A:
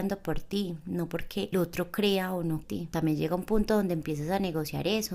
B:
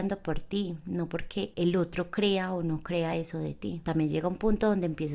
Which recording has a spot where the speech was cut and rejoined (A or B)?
A